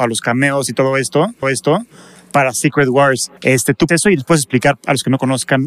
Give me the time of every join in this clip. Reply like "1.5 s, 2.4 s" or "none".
1.4 s, 3.4 s, 3.9 s